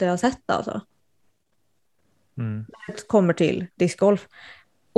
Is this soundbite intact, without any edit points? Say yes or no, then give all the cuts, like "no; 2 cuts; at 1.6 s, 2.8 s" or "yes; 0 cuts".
yes; 0 cuts